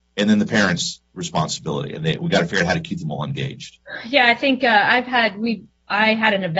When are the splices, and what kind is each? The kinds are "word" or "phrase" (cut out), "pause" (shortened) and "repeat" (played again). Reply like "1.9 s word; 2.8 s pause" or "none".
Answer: none